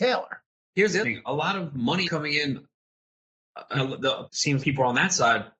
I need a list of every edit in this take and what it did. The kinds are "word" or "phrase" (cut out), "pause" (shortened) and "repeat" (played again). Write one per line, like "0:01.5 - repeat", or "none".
0:01.0 - word
0:02.0 - word
0:03.7 - word
0:04.3 - word
0:04.6 - word